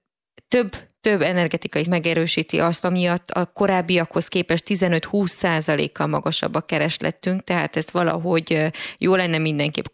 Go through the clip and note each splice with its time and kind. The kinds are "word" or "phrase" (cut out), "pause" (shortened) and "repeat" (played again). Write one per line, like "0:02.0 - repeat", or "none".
0:01.0 - pause
0:01.8 - word
0:02.8 - phrase